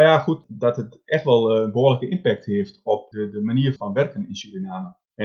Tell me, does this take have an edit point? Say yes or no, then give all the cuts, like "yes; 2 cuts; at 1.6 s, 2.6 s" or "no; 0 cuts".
yes; 1 cut; at 3.8 s